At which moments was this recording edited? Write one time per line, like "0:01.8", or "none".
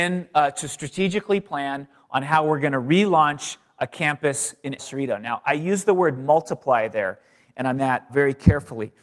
0:04.8
0:07.8
0:08.1